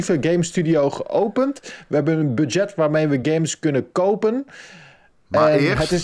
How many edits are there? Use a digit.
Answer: 0